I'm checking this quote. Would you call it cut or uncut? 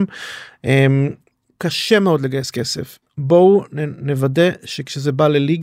uncut